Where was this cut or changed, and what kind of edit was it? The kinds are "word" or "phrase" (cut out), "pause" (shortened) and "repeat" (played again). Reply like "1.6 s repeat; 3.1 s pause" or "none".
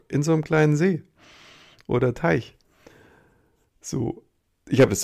none